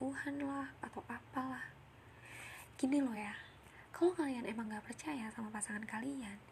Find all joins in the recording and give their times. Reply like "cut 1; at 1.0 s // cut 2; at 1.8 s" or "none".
none